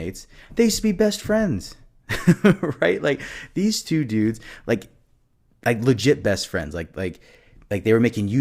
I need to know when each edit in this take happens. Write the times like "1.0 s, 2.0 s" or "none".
none